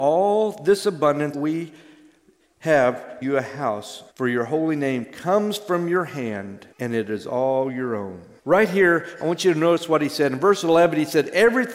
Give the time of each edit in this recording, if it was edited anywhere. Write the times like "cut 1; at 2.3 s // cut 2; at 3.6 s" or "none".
cut 1; at 1.3 s // cut 2; at 3.2 s // cut 3; at 4.1 s // cut 4; at 6.7 s // cut 5; at 8.4 s